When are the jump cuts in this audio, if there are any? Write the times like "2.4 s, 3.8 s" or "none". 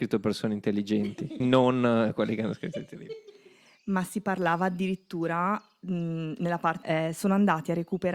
1.4 s, 6.8 s